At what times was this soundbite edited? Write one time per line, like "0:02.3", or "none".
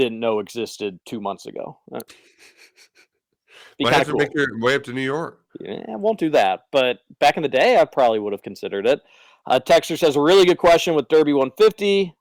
0:05.5